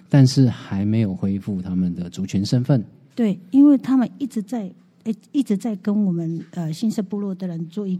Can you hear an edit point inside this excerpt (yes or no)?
no